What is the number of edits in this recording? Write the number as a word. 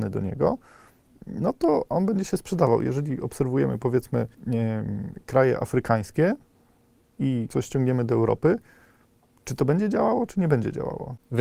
two